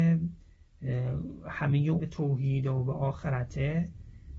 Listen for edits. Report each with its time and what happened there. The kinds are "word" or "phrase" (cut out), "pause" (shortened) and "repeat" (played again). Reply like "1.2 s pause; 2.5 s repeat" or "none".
2.0 s word